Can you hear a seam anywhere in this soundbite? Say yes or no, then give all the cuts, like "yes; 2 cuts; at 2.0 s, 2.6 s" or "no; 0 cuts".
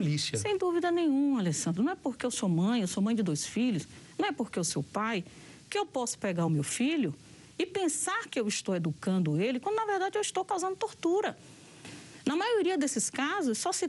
no; 0 cuts